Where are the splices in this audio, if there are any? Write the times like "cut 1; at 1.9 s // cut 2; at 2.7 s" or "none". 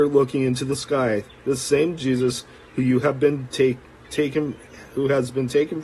none